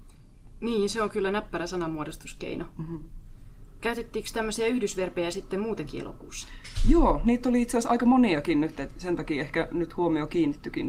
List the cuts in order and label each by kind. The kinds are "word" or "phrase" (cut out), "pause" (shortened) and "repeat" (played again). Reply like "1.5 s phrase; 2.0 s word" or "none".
none